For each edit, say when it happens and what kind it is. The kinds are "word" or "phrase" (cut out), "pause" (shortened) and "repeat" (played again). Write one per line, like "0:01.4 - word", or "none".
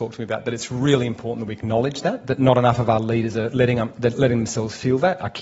none